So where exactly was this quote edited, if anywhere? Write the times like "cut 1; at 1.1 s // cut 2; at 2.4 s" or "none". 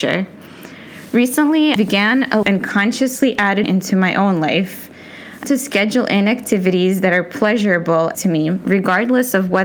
cut 1; at 1.8 s // cut 2; at 2.4 s // cut 3; at 3.6 s // cut 4; at 5.4 s // cut 5; at 8.1 s